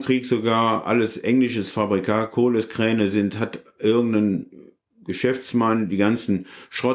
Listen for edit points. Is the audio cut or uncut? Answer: uncut